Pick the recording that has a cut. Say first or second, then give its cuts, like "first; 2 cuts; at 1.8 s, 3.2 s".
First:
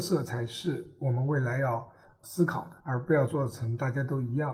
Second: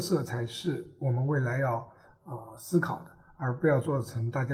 first; 2 cuts; at 2.2 s, 2.8 s